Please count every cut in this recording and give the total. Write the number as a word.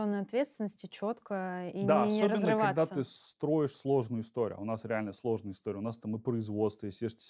zero